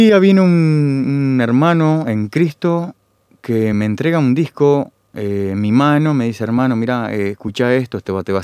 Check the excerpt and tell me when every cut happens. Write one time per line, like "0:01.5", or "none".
none